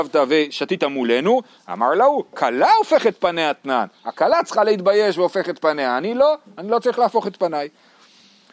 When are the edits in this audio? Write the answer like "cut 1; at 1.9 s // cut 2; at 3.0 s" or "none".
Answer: none